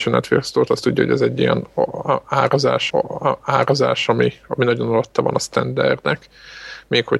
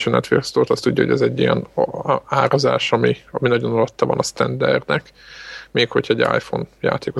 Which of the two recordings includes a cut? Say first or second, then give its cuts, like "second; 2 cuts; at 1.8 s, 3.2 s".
first; 1 cut; at 2.9 s